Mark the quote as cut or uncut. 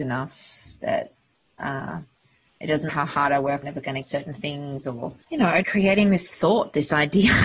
cut